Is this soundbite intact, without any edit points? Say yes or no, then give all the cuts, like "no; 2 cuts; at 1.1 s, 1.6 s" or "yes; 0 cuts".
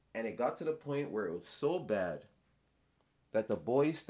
yes; 0 cuts